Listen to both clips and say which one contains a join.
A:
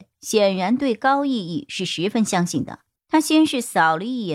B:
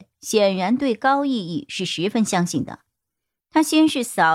A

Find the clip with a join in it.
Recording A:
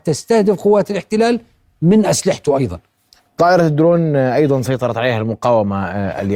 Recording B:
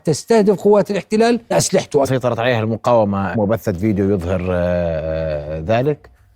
B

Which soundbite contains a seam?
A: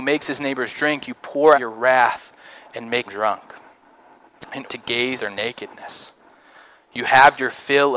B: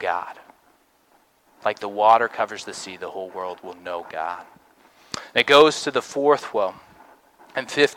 A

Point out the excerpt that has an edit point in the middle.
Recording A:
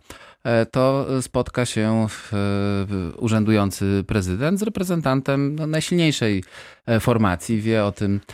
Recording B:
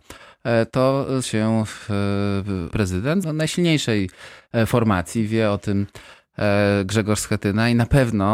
B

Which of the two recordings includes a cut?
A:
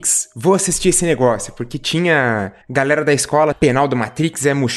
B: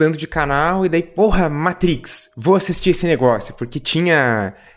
A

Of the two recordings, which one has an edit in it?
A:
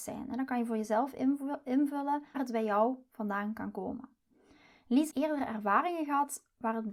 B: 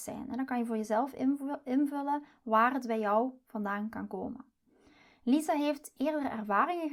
A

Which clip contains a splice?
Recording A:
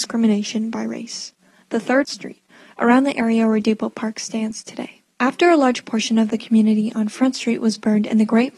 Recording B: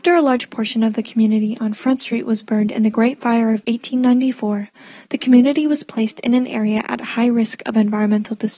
A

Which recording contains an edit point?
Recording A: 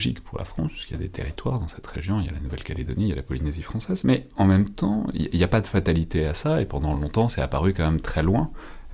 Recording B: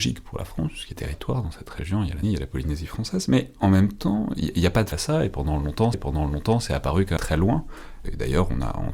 B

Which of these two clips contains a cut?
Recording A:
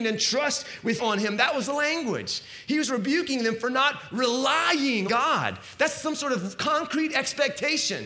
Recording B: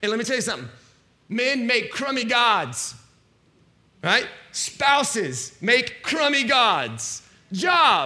A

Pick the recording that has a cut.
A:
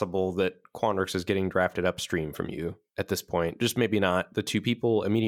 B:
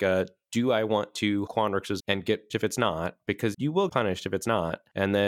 B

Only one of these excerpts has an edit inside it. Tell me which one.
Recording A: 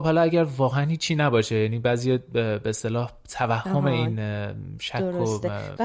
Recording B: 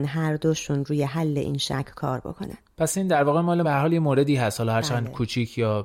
B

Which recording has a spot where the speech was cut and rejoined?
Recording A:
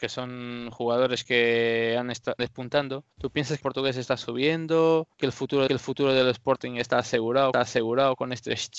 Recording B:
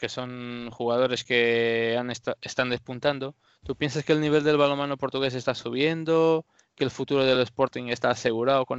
A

